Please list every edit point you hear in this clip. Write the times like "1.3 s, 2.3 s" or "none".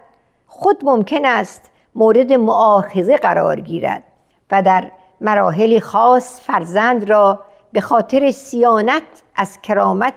none